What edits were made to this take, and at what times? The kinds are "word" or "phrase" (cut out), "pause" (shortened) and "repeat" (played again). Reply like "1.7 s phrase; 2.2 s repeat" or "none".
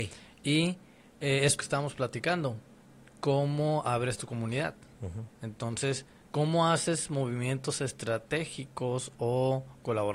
1.6 s phrase